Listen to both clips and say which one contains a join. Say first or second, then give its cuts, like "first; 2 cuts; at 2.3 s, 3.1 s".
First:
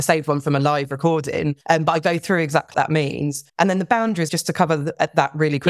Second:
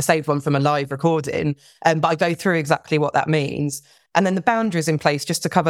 first; 4 cuts; at 1.6 s, 2.7 s, 3.5 s, 4.3 s